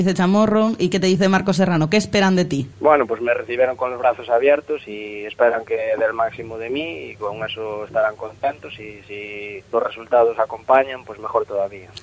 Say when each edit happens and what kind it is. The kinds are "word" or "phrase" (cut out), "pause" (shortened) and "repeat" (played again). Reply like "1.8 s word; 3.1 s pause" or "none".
2.7 s pause; 9.7 s pause